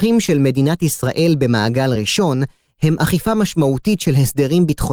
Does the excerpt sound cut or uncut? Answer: uncut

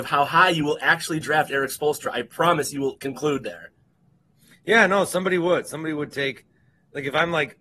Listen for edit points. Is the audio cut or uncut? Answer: uncut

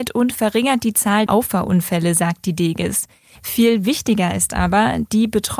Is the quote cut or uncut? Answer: cut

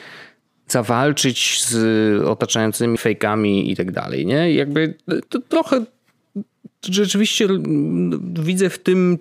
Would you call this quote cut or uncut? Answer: cut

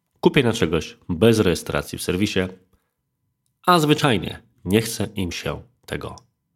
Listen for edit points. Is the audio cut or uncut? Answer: uncut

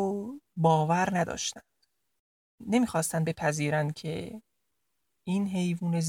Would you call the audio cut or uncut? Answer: uncut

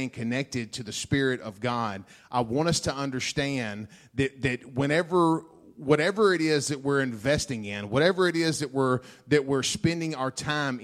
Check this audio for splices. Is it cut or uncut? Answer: uncut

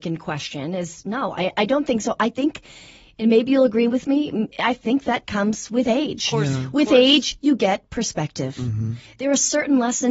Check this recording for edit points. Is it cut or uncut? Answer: uncut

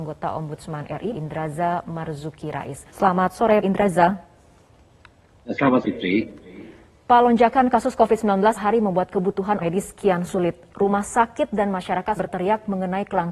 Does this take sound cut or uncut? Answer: cut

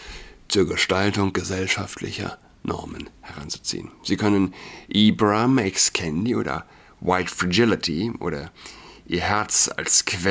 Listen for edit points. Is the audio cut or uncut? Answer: uncut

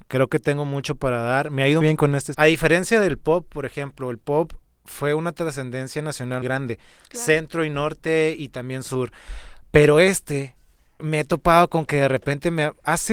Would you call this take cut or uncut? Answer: cut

